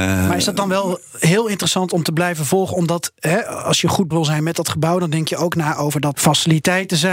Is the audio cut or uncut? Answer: cut